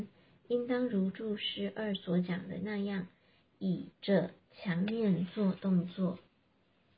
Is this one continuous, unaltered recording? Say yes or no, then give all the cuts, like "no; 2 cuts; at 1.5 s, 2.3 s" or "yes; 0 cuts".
no; 1 cut; at 3.9 s